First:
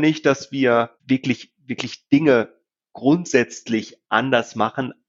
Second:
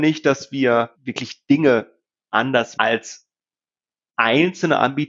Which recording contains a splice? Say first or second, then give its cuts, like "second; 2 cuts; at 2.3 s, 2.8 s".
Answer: second; 3 cuts; at 0.9 s, 2.3 s, 2.7 s